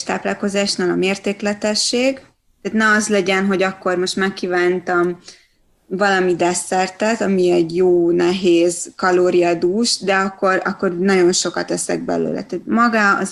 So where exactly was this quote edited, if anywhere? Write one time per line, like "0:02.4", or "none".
none